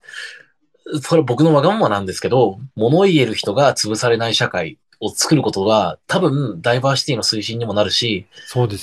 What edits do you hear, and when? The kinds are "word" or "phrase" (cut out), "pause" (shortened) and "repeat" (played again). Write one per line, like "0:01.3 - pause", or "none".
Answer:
0:02.7 - pause